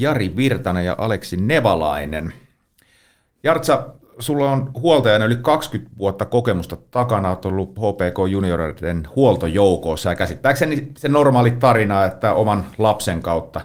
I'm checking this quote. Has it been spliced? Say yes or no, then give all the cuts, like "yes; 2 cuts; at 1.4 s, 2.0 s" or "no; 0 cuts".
no; 0 cuts